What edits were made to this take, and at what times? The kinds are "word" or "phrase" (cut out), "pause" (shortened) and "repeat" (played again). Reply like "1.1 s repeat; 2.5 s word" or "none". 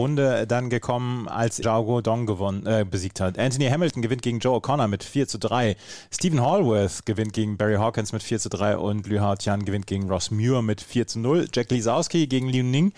1.6 s word